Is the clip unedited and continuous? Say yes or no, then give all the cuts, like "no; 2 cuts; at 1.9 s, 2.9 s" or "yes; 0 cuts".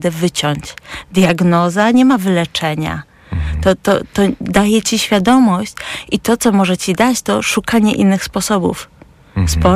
yes; 0 cuts